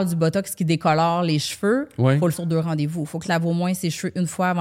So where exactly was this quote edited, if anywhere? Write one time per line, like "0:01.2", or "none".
0:02.3
0:03.2